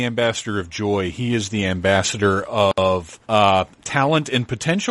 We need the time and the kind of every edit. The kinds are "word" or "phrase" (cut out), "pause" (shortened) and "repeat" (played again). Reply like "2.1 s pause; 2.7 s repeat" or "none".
3.2 s pause

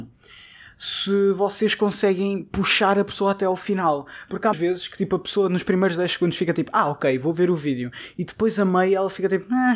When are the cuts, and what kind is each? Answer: 4.5 s word

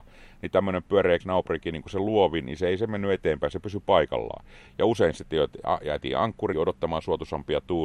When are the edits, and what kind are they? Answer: 1.2 s word; 6.5 s word

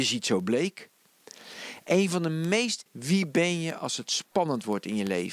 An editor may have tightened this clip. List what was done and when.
2.9 s phrase

